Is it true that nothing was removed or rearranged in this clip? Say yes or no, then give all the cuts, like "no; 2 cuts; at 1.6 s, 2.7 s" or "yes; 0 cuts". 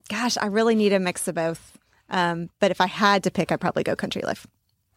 yes; 0 cuts